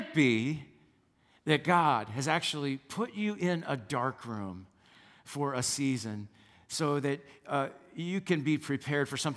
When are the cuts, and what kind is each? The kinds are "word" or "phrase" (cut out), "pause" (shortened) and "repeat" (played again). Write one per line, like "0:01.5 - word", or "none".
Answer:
none